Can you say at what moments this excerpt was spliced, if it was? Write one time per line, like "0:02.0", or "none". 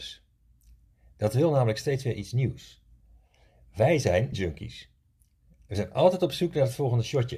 0:04.3